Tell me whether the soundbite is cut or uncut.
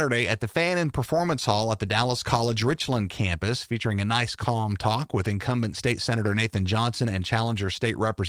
uncut